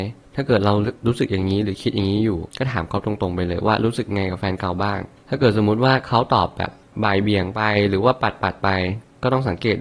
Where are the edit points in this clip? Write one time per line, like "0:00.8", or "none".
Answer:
0:02.5